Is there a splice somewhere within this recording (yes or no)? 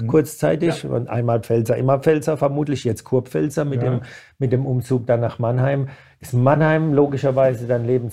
no